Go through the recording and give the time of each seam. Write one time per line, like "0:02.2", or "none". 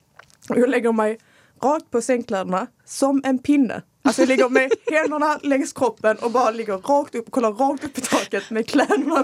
none